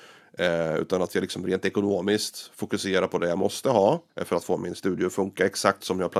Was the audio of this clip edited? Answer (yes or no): yes